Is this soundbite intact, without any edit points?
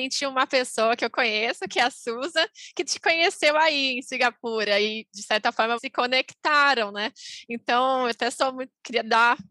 no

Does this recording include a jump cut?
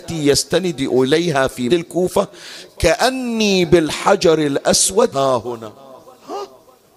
yes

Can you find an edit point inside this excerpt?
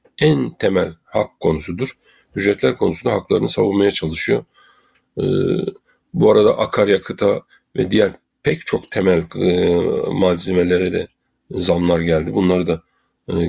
no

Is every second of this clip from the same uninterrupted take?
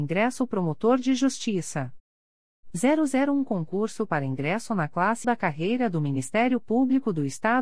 no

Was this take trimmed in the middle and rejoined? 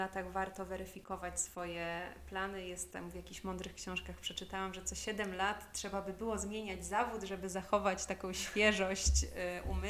no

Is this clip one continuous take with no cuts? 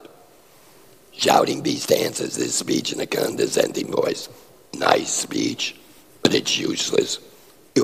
yes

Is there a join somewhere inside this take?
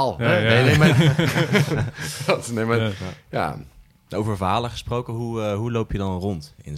no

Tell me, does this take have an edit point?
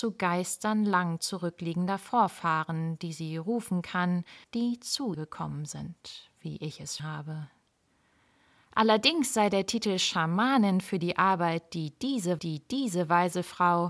yes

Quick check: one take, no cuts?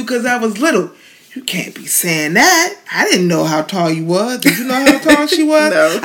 yes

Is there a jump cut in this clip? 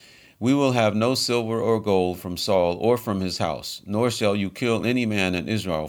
no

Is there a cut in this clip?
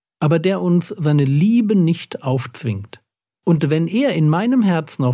no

